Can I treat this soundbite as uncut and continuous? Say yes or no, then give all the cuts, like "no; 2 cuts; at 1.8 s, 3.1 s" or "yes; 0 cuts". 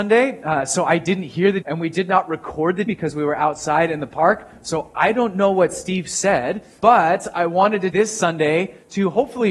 no; 4 cuts; at 1.6 s, 2.9 s, 6.8 s, 7.9 s